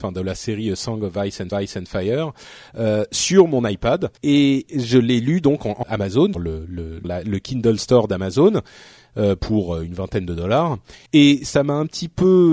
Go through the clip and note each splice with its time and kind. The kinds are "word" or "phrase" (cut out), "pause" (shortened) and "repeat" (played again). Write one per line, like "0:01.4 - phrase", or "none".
0:01.5 - repeat
0:04.2 - pause
0:05.8 - phrase
0:06.3 - word
0:07.0 - word
0:11.1 - pause